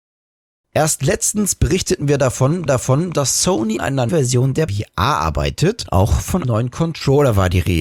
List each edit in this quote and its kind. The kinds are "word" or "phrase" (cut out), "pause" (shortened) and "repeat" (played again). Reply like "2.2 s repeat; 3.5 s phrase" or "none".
2.7 s repeat; 3.8 s word; 4.1 s word; 4.7 s word; 6.4 s word

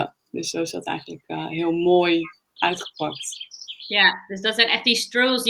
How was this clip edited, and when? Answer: 2.6 s word

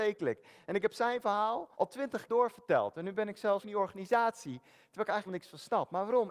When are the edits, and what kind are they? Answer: 1.7 s pause; 2.3 s word; 3.6 s word; 5.3 s word

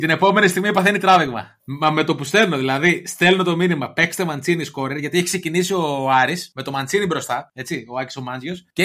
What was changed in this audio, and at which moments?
none

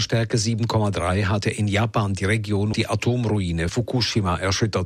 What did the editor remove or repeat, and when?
1.4 s word; 2.7 s word; 3.7 s word

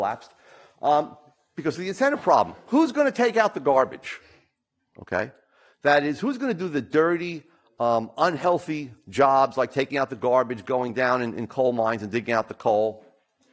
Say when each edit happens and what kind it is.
none

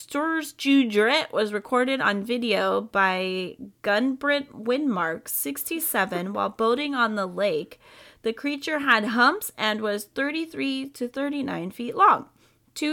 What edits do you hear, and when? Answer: 3.7 s pause

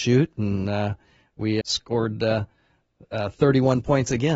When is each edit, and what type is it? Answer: 1.6 s word

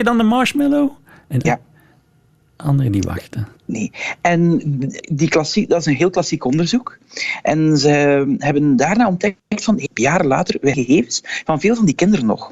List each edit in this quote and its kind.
1.4 s word; 3.6 s pause; 5.0 s word; 9.9 s phrase; 10.7 s word

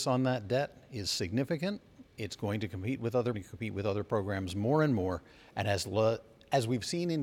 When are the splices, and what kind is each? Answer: 2.1 s pause; 3.3 s phrase

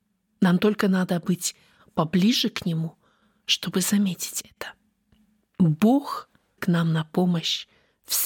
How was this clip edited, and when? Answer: 6.6 s word

